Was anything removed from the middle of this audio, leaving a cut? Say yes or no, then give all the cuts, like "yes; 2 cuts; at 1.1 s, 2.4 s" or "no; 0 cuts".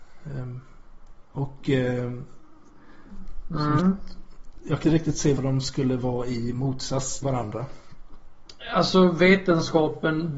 yes; 4 cuts; at 3.8 s, 4.8 s, 5.4 s, 7.2 s